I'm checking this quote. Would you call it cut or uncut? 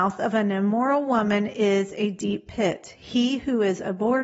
uncut